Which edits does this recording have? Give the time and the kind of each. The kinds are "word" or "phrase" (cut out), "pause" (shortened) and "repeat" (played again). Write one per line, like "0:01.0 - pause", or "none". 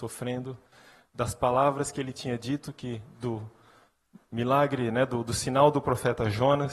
none